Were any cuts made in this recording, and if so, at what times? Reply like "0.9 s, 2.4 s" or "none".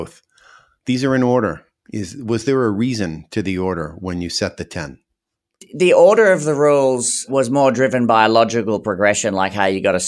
none